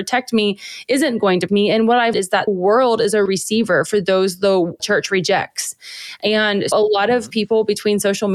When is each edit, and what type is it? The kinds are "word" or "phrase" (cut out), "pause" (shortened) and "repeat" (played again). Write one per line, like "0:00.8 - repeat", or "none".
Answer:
0:01.5 - word
0:02.1 - word
0:02.5 - word
0:03.3 - word
0:04.8 - word
0:06.7 - word